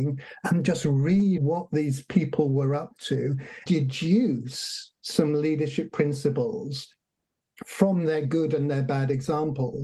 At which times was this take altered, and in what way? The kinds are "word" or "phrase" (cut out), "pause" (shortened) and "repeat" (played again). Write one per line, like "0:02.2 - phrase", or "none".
0:01.4 - word
0:03.7 - word